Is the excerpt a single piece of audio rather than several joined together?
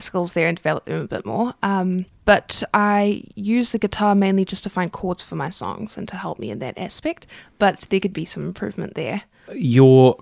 no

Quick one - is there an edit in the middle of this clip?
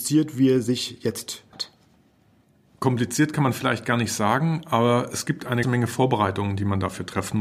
yes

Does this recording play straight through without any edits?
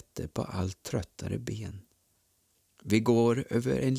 yes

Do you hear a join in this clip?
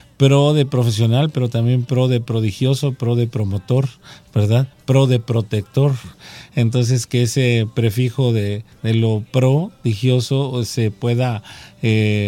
no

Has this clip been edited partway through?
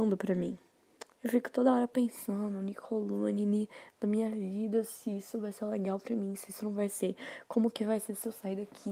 yes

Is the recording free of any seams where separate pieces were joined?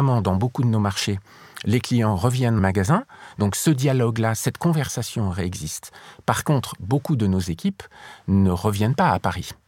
no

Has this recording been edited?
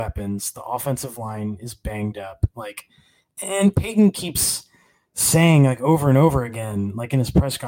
no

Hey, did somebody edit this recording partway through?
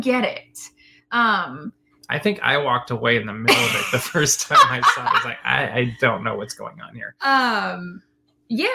no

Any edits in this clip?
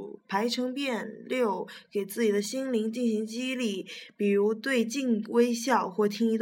no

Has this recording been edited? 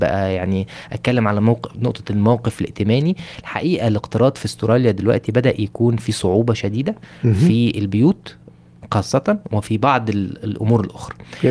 no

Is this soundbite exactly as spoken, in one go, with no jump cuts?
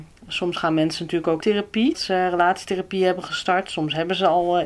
no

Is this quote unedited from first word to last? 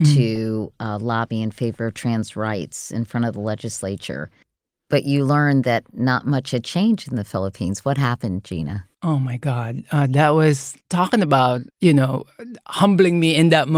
no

